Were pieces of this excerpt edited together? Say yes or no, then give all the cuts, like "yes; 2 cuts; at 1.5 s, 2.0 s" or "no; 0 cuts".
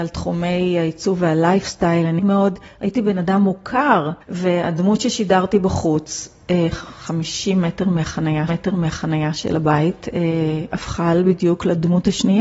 yes; 3 cuts; at 2.2 s, 4.2 s, 8.5 s